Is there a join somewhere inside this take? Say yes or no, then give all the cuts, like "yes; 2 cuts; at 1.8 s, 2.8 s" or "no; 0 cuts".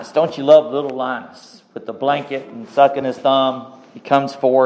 no; 0 cuts